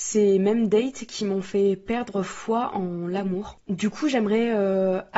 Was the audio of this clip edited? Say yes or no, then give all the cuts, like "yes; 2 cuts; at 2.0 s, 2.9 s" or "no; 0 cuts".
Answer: no; 0 cuts